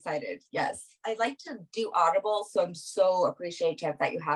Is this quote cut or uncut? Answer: uncut